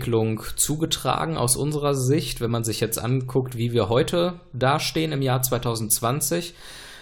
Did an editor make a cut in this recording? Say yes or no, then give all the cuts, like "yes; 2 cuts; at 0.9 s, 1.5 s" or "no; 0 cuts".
no; 0 cuts